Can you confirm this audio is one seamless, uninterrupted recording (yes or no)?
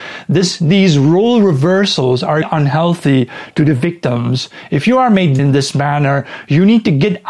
no